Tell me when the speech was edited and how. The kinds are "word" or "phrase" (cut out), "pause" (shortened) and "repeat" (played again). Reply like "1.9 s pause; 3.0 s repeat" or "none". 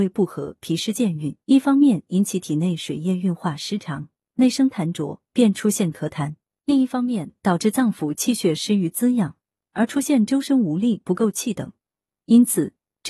1.4 s pause